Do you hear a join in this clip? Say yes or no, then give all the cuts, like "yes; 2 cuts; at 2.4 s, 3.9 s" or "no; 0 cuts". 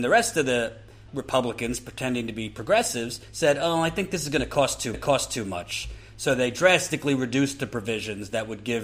yes; 2 cuts; at 1.1 s, 4.9 s